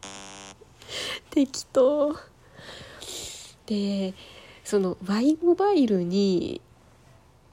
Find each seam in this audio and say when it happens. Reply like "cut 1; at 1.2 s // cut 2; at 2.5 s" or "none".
none